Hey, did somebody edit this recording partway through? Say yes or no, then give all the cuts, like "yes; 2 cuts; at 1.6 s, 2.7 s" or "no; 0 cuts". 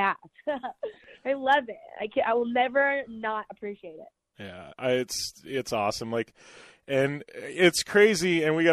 no; 0 cuts